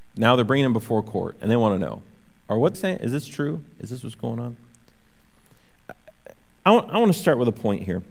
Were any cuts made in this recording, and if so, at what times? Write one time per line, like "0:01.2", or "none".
0:02.7